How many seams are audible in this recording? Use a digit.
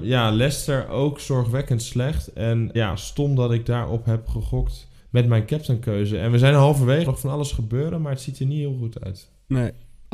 3